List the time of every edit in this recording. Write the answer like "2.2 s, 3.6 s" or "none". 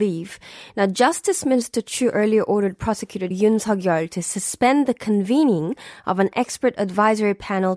3.3 s